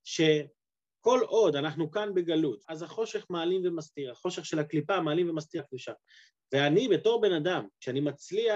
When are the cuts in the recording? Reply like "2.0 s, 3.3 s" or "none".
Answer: 2.6 s, 5.6 s

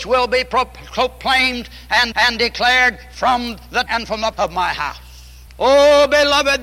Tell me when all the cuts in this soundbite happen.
2.1 s, 3.9 s, 4.3 s, 5.5 s

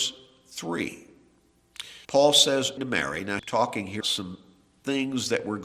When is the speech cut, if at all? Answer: 2.0 s, 2.8 s, 3.4 s, 4.0 s

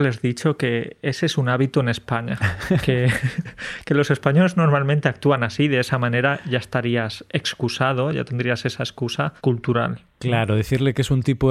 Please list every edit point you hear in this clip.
9.4 s

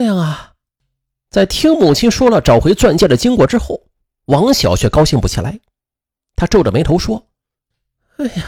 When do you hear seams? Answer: none

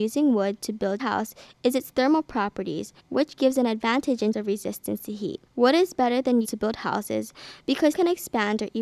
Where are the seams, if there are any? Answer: 1.0 s, 3.0 s, 4.3 s, 5.5 s, 6.4 s, 7.9 s

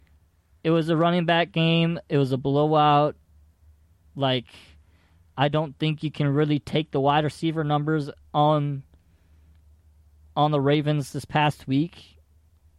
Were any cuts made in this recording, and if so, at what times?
none

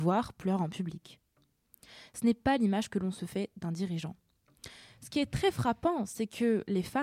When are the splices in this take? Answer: none

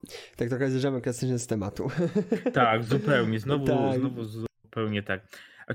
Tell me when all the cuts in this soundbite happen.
none

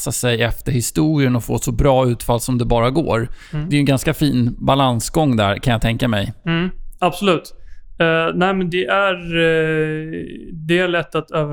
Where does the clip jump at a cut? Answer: none

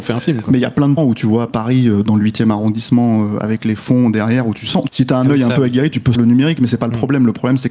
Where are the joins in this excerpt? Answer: 1.0 s, 4.9 s, 6.1 s

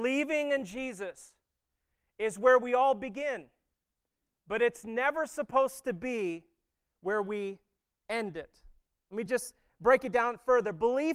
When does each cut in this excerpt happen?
none

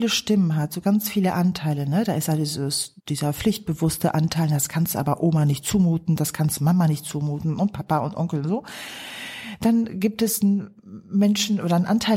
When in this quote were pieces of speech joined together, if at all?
3.0 s, 10.8 s

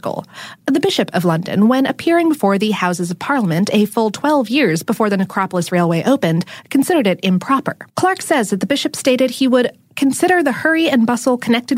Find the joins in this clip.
7.9 s

